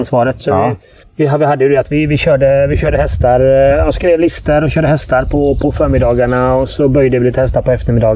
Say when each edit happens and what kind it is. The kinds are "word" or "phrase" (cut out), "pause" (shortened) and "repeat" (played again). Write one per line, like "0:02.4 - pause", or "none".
0:01.0 - pause

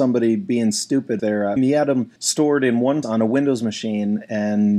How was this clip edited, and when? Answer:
0:01.2 - word
0:01.6 - word
0:02.2 - pause
0:03.0 - word

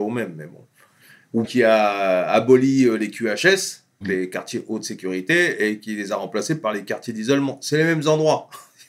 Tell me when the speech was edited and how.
0:01.4 - word
0:04.0 - word

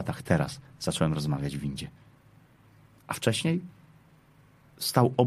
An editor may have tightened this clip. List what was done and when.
none

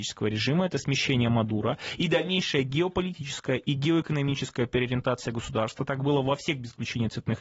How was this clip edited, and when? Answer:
none

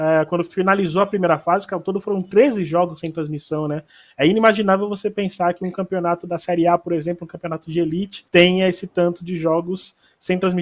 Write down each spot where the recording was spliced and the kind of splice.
0:08.3 - pause

